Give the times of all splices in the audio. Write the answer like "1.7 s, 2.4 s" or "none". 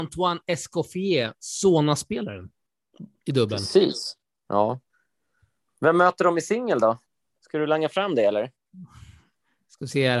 none